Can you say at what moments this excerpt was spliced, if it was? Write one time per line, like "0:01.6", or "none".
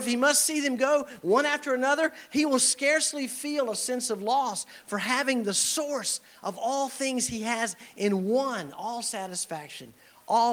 none